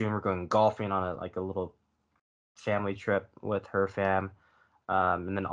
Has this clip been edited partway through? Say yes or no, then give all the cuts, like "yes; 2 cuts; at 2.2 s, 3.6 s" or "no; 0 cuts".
no; 0 cuts